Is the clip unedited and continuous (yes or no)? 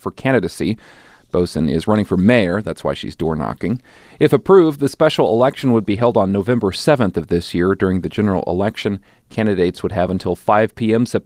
yes